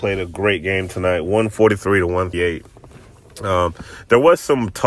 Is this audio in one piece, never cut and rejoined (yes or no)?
no